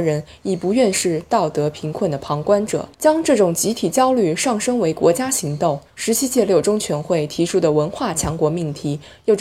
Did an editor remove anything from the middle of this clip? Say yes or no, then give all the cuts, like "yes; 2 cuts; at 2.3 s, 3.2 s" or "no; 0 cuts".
yes; 2 cuts; at 2.9 s, 5.9 s